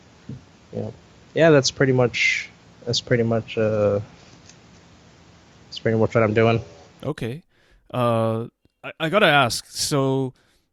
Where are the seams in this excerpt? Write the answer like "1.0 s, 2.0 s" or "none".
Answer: none